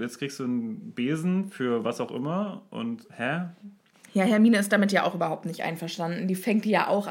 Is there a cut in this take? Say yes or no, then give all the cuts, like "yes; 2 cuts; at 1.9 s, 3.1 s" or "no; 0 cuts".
no; 0 cuts